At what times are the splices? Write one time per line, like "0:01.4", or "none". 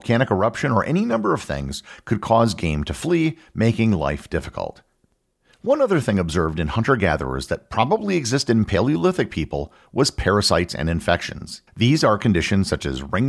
0:11.7